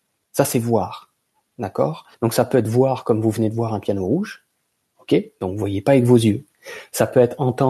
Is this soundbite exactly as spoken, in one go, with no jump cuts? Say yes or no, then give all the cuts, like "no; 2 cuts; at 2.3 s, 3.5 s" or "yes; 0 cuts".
no; 1 cut; at 2.1 s